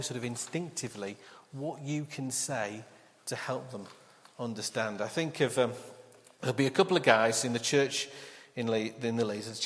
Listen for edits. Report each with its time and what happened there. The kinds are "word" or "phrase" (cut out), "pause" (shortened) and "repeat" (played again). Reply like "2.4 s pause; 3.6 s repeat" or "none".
none